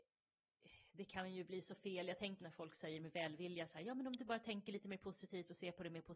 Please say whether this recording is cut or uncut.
cut